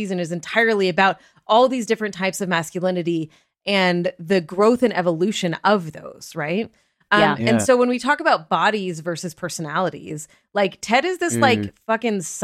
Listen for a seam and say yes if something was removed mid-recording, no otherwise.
no